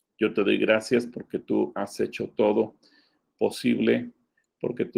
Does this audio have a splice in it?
no; 0 cuts

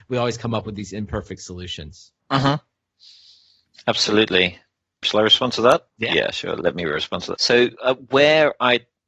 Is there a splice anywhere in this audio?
yes; 4 cuts; at 2.2 s, 5.0 s, 5.9 s, 7.3 s

